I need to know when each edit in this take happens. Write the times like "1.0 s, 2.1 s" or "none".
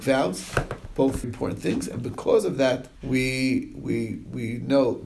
1.2 s, 3.0 s